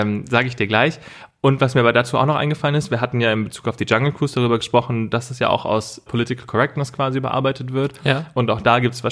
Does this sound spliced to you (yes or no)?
yes